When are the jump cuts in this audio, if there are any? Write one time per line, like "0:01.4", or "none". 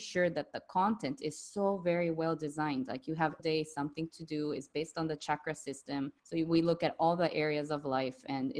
0:03.4
0:06.2